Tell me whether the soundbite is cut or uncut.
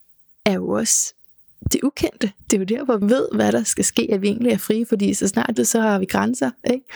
cut